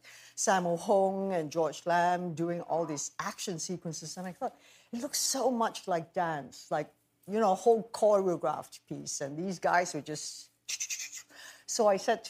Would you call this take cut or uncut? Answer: uncut